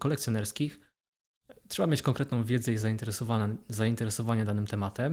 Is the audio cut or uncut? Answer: uncut